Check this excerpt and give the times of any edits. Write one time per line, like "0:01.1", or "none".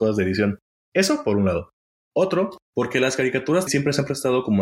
0:02.6
0:03.7